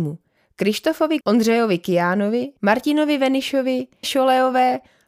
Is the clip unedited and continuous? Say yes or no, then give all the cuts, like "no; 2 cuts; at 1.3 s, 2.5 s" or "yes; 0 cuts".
no; 3 cuts; at 1.2 s, 2.6 s, 4.0 s